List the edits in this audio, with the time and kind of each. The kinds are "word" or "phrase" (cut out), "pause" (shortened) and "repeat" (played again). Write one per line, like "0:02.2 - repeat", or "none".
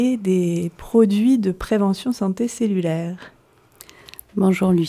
none